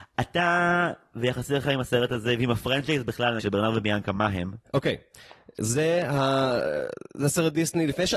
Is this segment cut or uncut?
cut